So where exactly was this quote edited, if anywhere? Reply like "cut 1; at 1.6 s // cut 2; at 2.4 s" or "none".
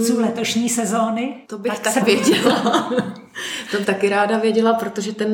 cut 1; at 1.4 s // cut 2; at 2.0 s // cut 3; at 3.8 s